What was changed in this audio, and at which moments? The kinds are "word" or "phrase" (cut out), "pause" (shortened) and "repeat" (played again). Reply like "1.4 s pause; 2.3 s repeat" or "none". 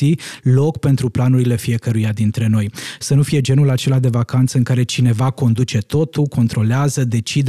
none